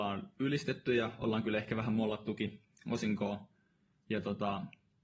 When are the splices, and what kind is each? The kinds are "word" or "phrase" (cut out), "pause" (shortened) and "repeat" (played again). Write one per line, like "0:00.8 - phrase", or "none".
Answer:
none